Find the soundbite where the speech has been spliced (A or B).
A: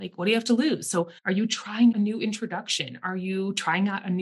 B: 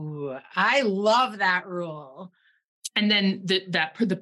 A